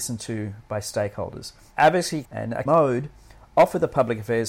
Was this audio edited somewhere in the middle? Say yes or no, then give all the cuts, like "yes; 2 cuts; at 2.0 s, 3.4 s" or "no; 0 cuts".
yes; 2 cuts; at 2.2 s, 2.7 s